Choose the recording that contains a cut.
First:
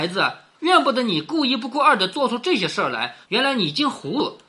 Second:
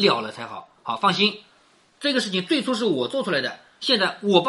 first; 1 cut; at 3.2 s

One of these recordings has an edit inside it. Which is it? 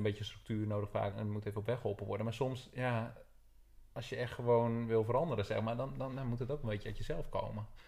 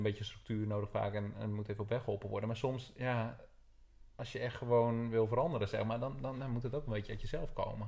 first; 1 cut; at 1.1 s

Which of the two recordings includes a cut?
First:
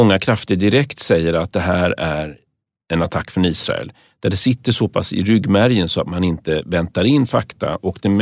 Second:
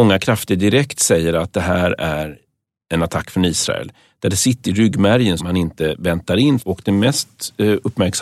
second; 3 cuts; at 4.6 s, 5.4 s, 6.6 s

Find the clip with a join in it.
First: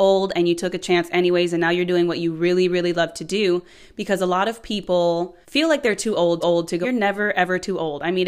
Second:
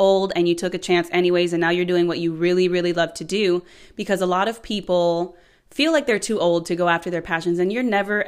first; 3 cuts; at 5.4 s, 6.4 s, 6.8 s

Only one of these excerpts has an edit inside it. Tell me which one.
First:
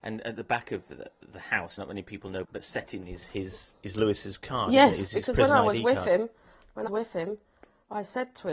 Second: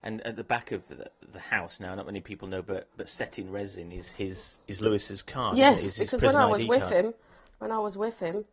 first; 4 cuts; at 1.8 s, 2.4 s, 3.0 s, 6.9 s

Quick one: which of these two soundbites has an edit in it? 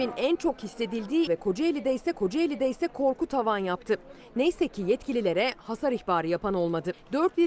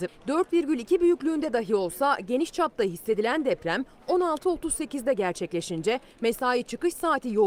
first; 2 cuts; at 1.3 s, 2.1 s

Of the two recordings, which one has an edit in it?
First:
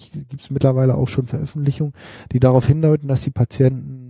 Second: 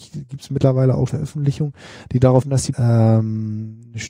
second; 3 cuts; at 1.1 s, 2.4 s, 2.7 s

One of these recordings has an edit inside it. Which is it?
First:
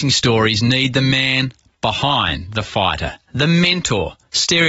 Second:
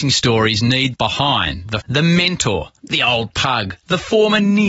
second; 3 cuts; at 0.9 s, 1.8 s, 2.8 s

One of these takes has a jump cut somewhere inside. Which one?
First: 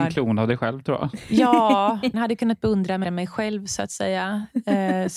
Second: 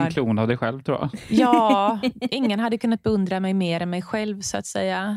first; 2 cuts; at 2.1 s, 3.0 s

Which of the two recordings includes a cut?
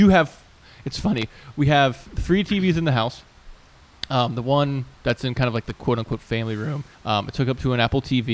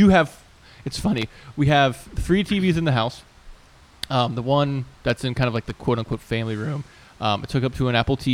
first; 1 cut; at 6.9 s

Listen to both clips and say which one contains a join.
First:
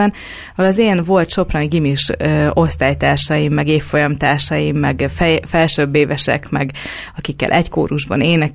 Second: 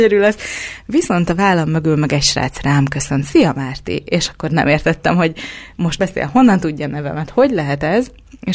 second; 1 cut; at 6.0 s

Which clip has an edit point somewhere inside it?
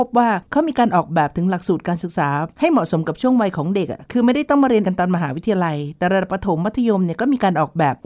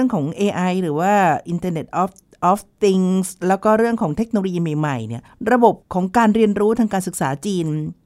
first; 1 cut; at 4.8 s

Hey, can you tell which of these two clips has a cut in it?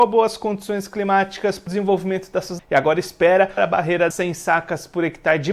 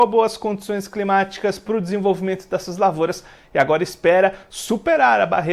first; 4 cuts; at 1.7 s, 2.6 s, 3.6 s, 4.1 s

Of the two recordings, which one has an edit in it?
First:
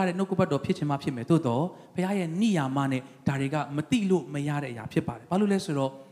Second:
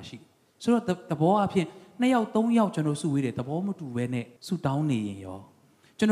second; 1 cut; at 4.4 s

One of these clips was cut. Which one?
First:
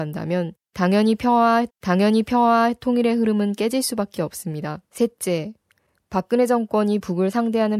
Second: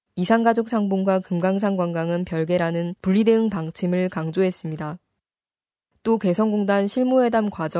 first; 2 cuts; at 1.7 s, 4.9 s

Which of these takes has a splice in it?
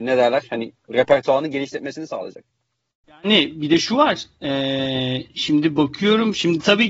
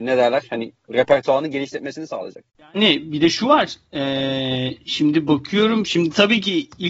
second; 1 cut; at 2.5 s

